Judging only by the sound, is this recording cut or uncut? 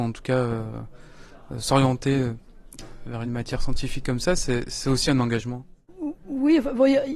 uncut